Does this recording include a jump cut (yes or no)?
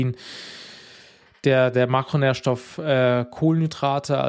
no